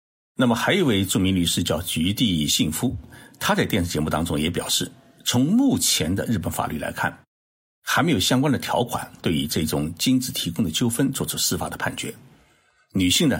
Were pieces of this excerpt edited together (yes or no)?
no